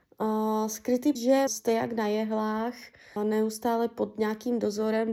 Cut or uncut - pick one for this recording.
cut